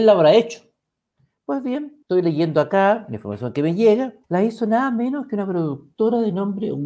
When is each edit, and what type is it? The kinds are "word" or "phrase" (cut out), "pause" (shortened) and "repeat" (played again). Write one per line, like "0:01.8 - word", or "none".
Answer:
0:02.0 - pause
0:04.2 - pause